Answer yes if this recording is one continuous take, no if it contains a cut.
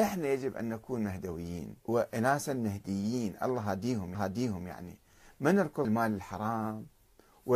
no